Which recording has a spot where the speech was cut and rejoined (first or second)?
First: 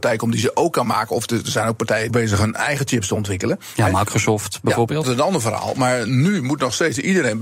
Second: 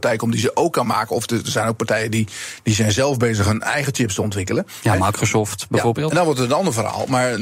first